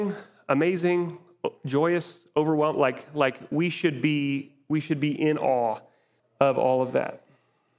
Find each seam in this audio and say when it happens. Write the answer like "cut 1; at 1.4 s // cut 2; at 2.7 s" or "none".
cut 1; at 6.2 s